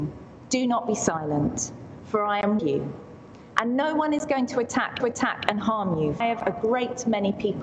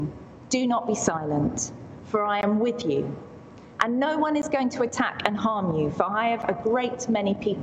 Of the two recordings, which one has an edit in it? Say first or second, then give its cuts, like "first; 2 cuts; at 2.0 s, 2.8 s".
first; 3 cuts; at 2.6 s, 5.0 s, 6.2 s